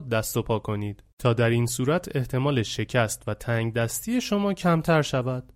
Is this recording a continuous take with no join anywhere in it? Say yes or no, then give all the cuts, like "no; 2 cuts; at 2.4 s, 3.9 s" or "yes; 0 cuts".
yes; 0 cuts